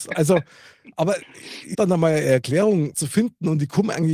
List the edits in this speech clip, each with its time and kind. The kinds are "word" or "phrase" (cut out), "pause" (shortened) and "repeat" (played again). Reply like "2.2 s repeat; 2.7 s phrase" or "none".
1.7 s word; 2.9 s word